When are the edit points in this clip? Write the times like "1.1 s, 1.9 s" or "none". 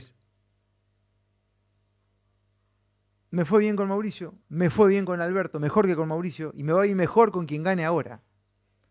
4.4 s